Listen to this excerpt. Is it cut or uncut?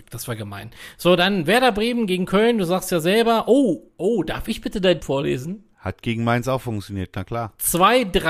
cut